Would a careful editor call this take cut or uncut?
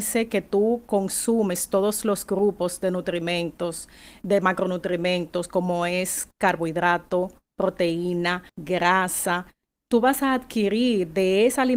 cut